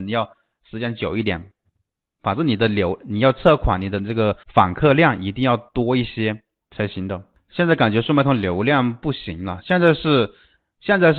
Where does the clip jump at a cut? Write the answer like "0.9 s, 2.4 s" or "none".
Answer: 4.4 s

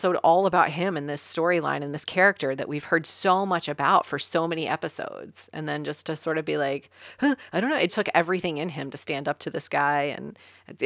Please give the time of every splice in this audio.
7.9 s

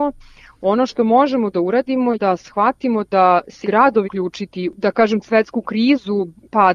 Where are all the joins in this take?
2.1 s, 3.6 s, 4.0 s, 5.2 s

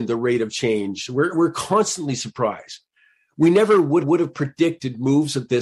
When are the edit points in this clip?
4.0 s

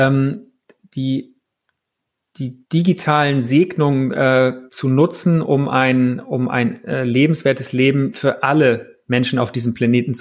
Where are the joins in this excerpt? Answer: 2.6 s, 4.7 s, 9.0 s

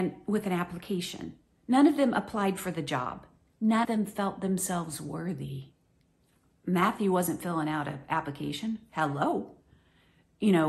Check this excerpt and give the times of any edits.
3.8 s

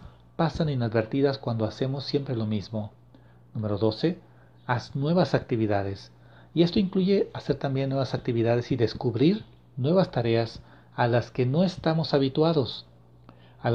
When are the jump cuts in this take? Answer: none

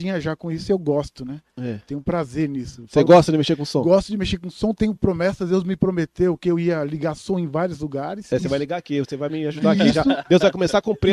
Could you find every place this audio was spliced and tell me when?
none

